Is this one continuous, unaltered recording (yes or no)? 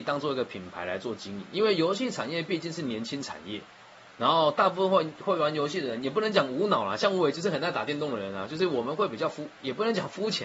yes